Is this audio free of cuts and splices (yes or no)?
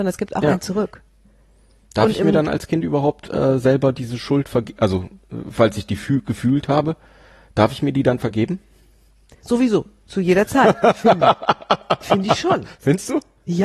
yes